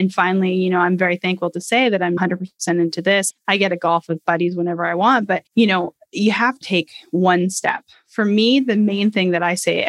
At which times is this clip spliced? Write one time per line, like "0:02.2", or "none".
0:02.2
0:03.3
0:05.5
0:06.6